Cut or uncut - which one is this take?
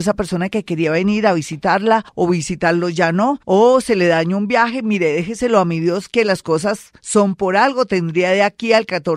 cut